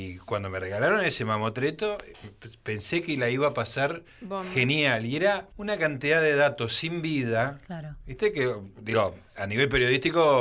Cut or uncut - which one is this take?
cut